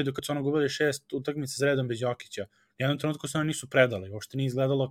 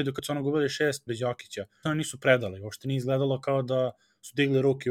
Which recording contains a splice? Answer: second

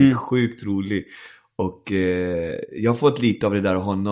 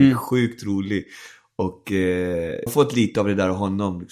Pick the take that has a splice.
second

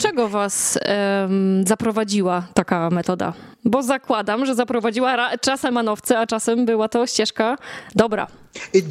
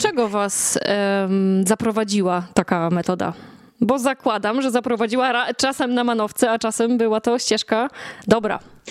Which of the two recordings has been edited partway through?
first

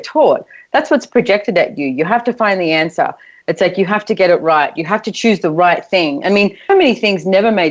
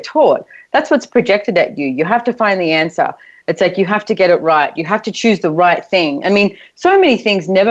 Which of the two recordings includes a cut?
first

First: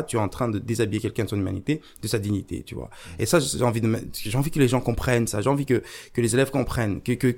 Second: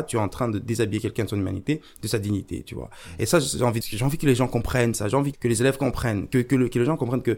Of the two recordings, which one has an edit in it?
second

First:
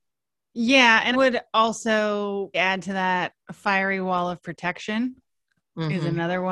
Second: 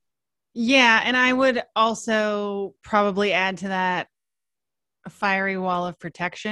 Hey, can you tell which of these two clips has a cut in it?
first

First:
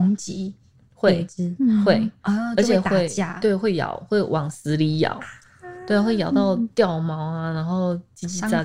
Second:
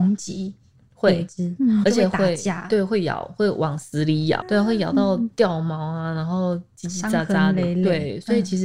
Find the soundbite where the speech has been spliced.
second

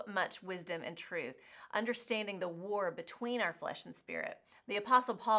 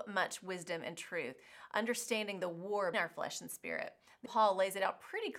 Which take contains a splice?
second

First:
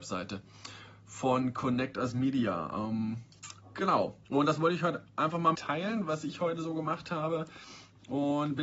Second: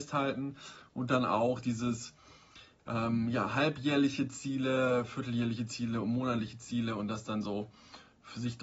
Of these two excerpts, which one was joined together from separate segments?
first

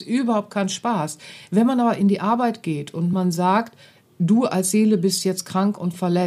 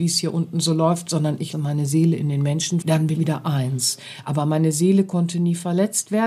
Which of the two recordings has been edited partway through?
second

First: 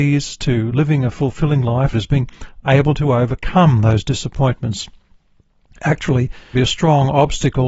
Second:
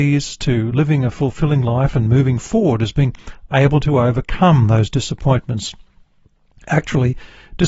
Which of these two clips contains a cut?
first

